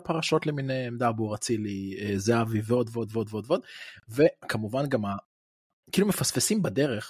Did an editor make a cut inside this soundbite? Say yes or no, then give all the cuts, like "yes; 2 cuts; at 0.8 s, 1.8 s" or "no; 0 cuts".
no; 0 cuts